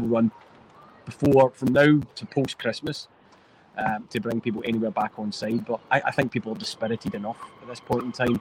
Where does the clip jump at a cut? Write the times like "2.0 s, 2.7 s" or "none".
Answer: 5.8 s